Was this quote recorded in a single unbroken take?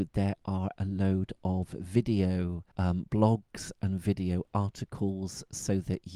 no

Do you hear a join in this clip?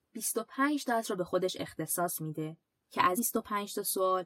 yes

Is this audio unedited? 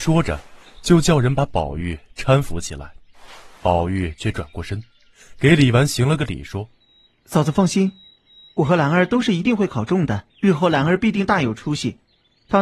no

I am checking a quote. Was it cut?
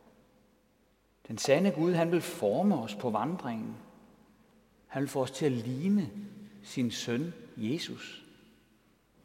no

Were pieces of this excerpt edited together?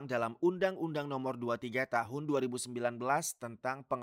no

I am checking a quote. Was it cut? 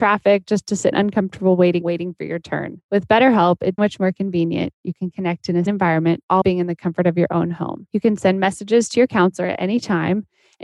yes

